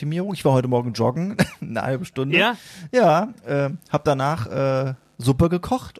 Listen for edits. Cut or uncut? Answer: cut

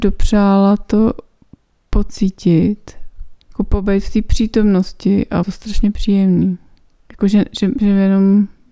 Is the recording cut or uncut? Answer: cut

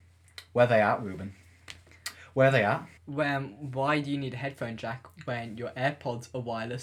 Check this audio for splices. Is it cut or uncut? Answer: cut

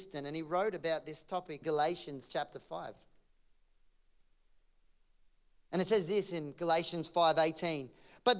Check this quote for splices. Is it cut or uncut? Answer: cut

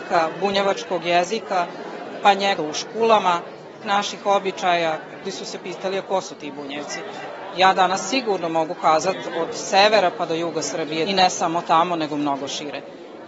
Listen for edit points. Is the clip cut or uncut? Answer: cut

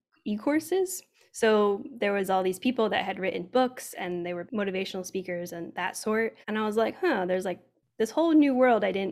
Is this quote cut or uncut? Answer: cut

